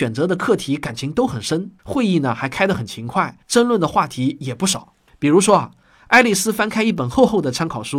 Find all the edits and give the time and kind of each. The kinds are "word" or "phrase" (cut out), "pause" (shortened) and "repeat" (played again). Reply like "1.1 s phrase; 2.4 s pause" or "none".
1.8 s pause; 3.4 s pause